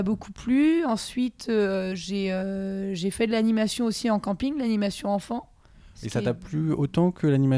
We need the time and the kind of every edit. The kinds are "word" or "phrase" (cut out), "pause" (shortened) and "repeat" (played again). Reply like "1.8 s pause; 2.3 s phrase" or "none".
none